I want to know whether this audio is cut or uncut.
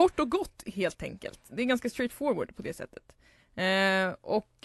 uncut